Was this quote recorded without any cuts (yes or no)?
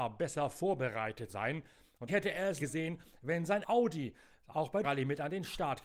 no